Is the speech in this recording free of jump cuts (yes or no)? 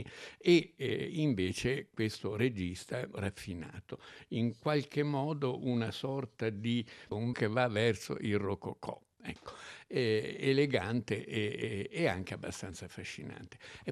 no